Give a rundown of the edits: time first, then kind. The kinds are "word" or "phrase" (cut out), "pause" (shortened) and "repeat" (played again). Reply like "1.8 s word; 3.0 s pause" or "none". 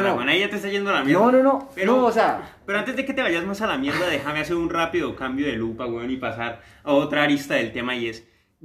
none